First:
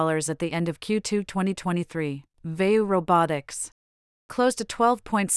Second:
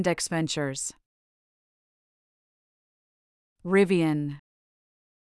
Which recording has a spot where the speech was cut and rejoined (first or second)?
first